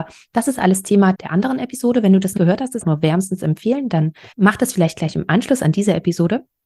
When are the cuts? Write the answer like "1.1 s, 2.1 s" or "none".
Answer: 1.1 s, 2.4 s, 2.8 s, 4.3 s